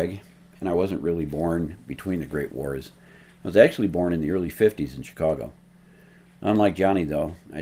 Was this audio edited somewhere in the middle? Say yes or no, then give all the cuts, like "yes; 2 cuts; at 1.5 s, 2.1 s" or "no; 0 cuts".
no; 0 cuts